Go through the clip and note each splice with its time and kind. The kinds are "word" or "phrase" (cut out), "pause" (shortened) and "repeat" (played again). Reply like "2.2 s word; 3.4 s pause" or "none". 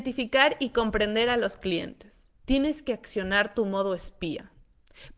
2.4 s pause